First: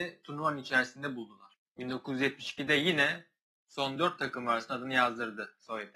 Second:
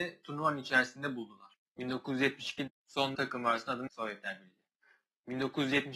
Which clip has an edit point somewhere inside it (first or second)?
second